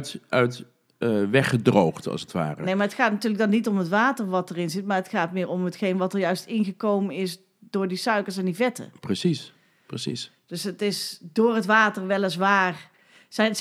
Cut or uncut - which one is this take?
uncut